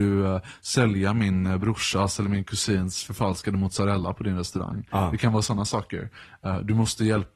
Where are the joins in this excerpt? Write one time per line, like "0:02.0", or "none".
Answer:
none